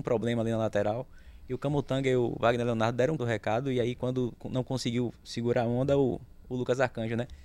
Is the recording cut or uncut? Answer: cut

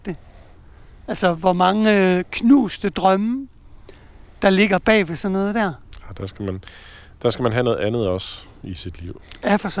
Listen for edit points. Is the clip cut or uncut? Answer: cut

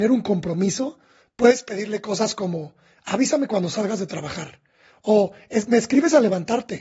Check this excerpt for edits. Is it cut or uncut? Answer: uncut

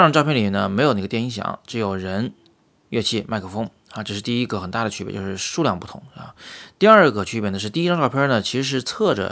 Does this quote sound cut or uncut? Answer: uncut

